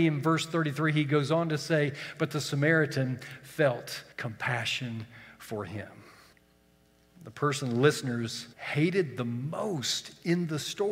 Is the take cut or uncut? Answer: cut